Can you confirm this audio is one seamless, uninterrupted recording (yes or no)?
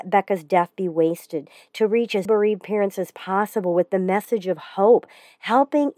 no